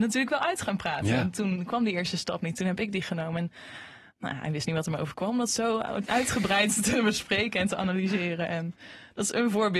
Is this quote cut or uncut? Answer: uncut